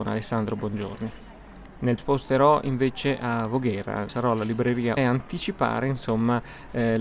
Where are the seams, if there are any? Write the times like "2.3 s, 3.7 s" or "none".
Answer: 2.0 s, 4.1 s, 5.0 s